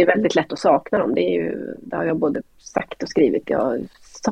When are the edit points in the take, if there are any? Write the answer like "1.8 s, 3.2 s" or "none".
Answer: 3.4 s